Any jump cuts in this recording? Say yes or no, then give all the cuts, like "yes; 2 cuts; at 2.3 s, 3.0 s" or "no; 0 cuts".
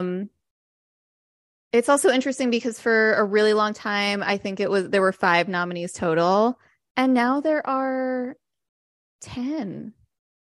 no; 0 cuts